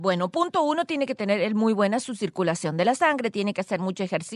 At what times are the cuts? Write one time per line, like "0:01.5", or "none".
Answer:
none

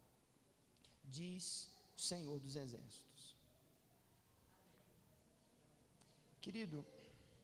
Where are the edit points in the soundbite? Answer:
none

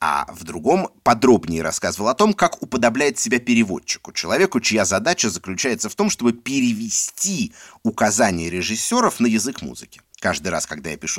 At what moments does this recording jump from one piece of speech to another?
0:10.1

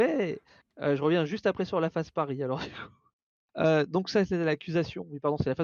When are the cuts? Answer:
none

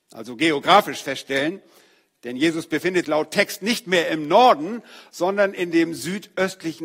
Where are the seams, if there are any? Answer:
0:03.0

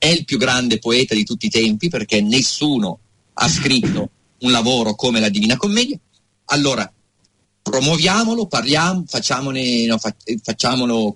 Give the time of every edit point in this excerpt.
none

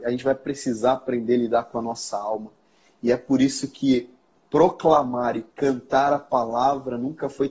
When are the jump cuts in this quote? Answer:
none

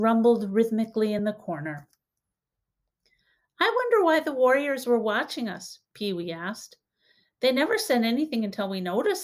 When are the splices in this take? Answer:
none

